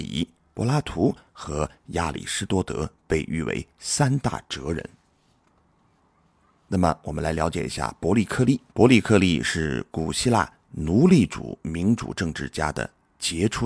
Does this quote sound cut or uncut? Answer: cut